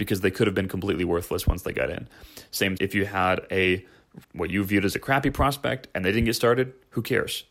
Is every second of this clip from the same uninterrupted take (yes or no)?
no